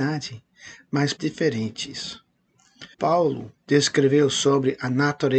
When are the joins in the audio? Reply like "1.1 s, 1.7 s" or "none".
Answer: 1.2 s, 2.9 s